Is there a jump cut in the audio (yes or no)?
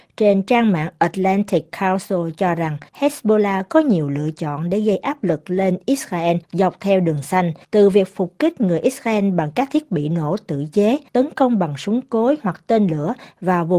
yes